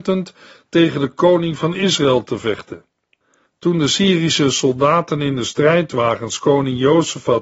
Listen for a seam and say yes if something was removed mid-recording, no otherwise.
no